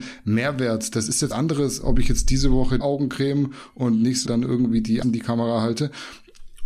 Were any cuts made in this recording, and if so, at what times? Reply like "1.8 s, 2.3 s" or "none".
1.3 s, 2.8 s, 4.2 s, 5.0 s